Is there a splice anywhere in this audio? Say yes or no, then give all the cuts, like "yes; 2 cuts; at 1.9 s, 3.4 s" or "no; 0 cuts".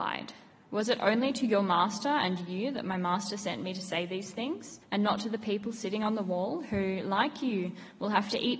yes; 1 cut; at 4.8 s